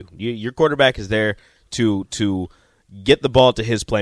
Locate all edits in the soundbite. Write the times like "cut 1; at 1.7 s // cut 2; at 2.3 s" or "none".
none